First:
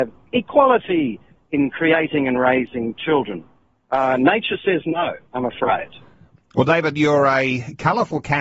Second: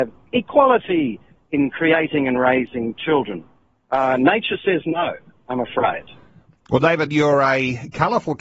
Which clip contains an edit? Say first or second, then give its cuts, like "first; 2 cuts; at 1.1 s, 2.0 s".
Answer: first; 1 cut; at 5.3 s